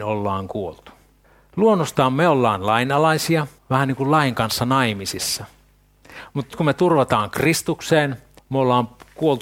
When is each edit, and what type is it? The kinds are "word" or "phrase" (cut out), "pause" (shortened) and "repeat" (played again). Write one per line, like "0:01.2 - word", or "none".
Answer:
0:01.2 - pause
0:03.6 - pause
0:06.5 - word
0:08.4 - pause